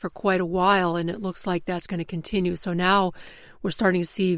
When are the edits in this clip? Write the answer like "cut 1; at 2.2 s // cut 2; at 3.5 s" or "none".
none